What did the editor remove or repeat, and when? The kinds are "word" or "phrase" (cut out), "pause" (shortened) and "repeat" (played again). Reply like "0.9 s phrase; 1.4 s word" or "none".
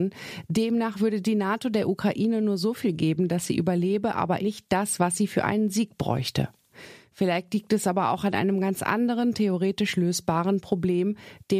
4.4 s word